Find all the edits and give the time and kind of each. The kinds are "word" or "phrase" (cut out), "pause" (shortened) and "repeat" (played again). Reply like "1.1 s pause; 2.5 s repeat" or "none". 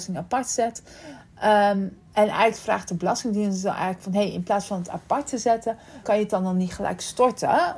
2.1 s pause; 6.0 s word